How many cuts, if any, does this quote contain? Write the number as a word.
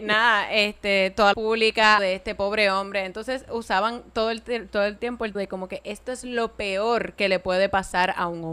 three